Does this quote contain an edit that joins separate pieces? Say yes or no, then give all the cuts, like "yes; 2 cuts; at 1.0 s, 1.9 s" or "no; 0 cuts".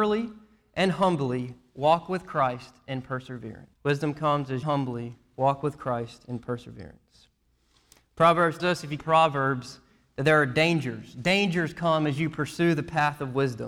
yes; 4 cuts; at 3.7 s, 4.6 s, 8.6 s, 9.0 s